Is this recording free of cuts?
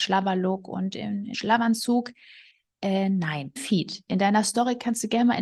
no; 2 cuts; at 1.3 s, 3.6 s

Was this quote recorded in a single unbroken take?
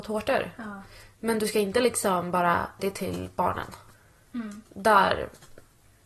no; 2 cuts; at 2.8 s, 3.9 s

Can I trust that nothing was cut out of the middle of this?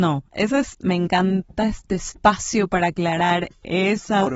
yes; 0 cuts

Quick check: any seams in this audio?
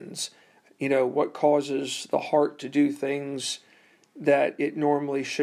no; 0 cuts

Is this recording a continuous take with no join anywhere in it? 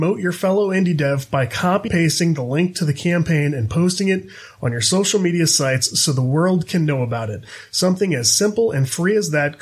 no; 1 cut; at 1.9 s

